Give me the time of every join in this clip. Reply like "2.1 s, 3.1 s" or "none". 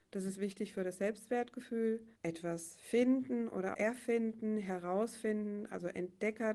2.1 s, 3.7 s